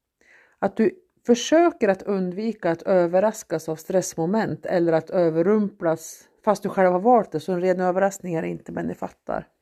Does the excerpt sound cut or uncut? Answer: uncut